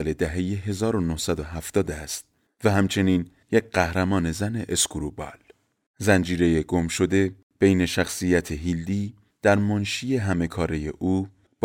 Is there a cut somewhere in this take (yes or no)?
no